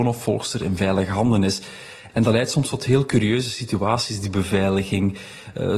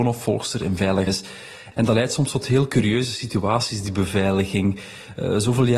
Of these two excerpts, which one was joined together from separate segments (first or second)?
second